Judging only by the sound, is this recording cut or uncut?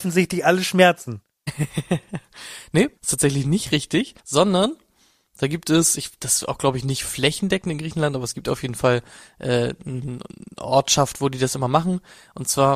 cut